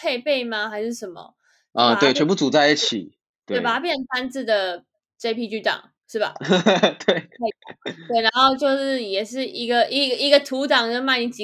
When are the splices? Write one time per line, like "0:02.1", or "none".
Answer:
0:06.0